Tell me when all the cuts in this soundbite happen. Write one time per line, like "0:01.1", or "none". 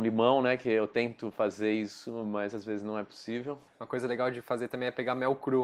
0:03.7